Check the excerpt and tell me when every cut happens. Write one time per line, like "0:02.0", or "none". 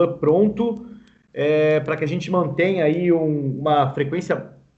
none

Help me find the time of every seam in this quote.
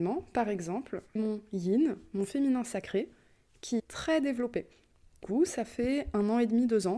0:01.2
0:03.8
0:05.2

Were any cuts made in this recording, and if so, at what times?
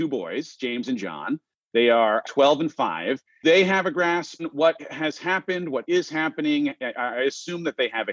0:02.2
0:03.4
0:04.4

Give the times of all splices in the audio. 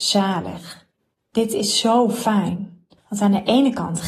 0:01.0
0:03.0

